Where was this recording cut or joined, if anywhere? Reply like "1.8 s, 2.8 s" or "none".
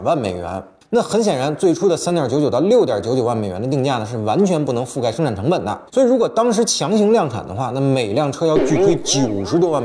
5.9 s